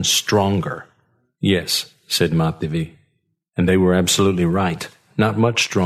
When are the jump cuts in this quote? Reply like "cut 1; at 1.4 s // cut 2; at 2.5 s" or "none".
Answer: none